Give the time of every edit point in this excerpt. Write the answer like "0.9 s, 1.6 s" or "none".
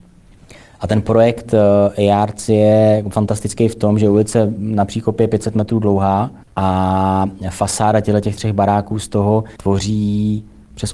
6.4 s, 9.6 s